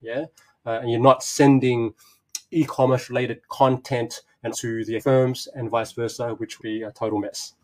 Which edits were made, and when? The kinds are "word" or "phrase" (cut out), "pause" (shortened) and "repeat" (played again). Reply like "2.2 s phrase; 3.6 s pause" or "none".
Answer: 4.5 s word; 5.0 s word; 6.6 s word